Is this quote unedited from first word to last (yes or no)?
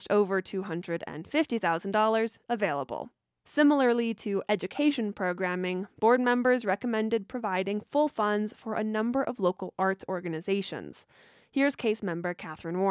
yes